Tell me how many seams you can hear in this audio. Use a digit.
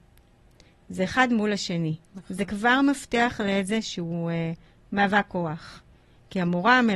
0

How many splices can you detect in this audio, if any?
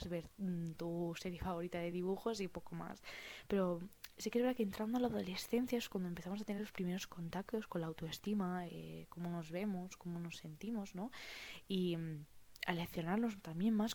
0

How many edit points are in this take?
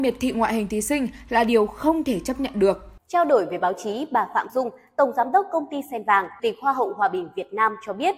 3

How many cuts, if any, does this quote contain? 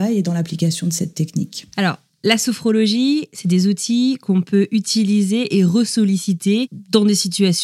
1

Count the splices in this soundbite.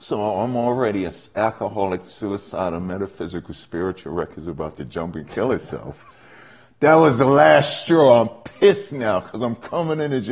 0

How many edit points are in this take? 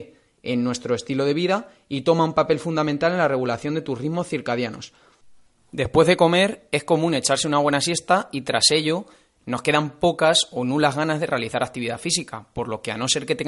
0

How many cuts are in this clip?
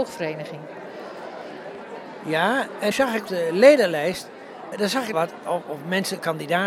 5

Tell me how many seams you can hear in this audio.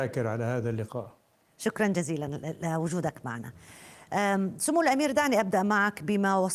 0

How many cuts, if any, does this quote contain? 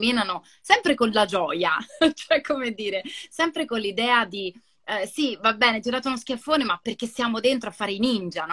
0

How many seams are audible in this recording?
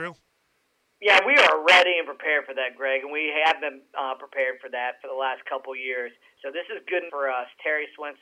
1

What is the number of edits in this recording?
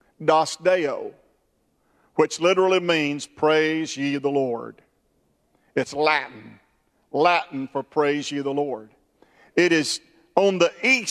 0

